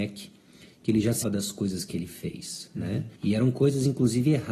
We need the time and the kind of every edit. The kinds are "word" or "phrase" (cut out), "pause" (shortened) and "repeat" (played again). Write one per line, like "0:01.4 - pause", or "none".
0:01.2 - word
0:03.2 - pause